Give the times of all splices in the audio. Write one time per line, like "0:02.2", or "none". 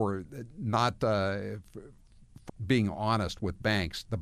0:02.5